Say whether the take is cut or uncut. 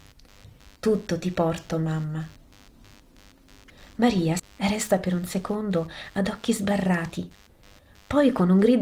cut